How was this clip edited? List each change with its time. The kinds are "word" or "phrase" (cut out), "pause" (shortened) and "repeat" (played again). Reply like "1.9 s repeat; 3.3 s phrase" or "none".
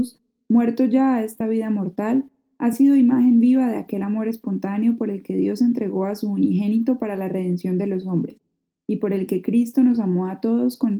none